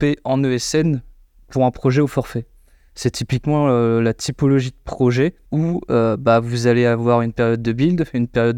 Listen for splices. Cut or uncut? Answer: uncut